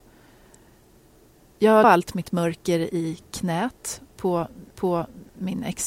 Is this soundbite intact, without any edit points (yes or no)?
no